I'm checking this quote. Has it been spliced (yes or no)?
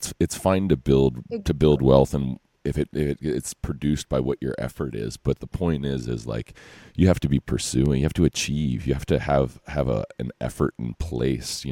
no